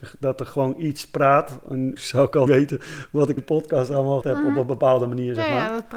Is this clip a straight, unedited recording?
no; 4 cuts; at 2.0 s, 2.5 s, 3.4 s, 4.2 s

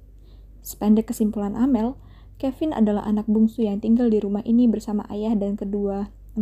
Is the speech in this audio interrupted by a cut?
no; 0 cuts

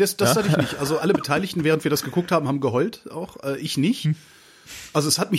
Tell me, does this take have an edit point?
yes; 1 cut; at 1.0 s

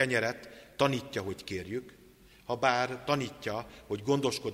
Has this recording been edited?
no; 0 cuts

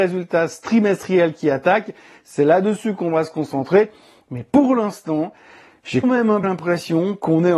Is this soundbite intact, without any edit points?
no; 2 cuts; at 6.0 s, 6.4 s

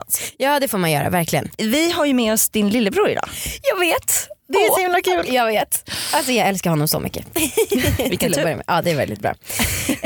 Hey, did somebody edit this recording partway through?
no; 0 cuts

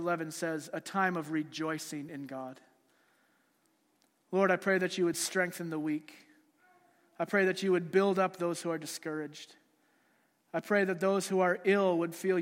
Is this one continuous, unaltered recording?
yes; 0 cuts

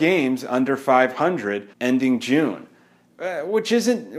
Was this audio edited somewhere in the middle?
yes; 1 cut; at 1.7 s

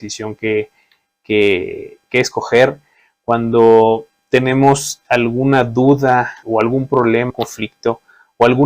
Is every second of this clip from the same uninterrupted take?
no; 3 cuts; at 5.0 s, 6.4 s, 7.3 s

